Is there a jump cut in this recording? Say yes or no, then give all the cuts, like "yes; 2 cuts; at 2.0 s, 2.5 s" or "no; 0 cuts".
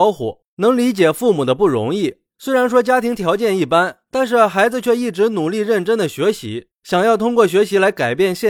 no; 0 cuts